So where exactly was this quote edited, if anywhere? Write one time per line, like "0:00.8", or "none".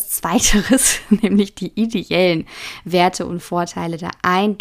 none